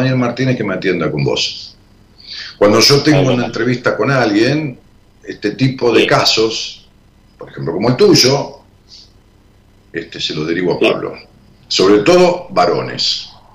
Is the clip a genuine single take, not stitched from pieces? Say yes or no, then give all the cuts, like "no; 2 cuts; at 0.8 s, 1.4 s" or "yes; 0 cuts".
yes; 0 cuts